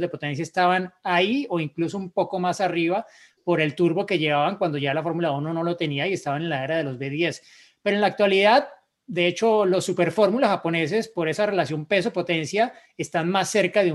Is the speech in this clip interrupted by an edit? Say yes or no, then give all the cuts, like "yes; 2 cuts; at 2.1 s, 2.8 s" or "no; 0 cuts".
no; 0 cuts